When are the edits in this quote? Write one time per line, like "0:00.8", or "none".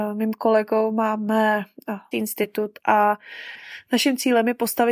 0:02.1